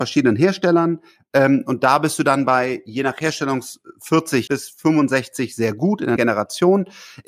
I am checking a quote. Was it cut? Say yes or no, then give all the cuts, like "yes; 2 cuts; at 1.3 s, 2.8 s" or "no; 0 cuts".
yes; 2 cuts; at 4.5 s, 6.2 s